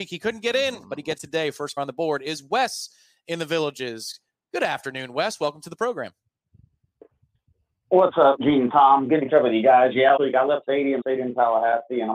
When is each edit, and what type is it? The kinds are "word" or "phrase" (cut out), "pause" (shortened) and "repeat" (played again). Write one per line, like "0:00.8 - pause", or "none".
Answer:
0:01.2 - word
0:01.8 - word
0:09.3 - word
0:10.2 - word
0:10.6 - word
0:11.0 - word